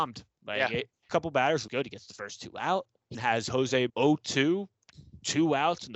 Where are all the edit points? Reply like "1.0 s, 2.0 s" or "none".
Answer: 1.1 s, 1.7 s, 3.1 s, 3.9 s